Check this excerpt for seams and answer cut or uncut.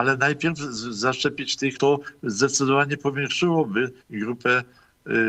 cut